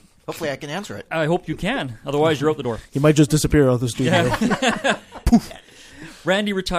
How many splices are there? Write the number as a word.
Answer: zero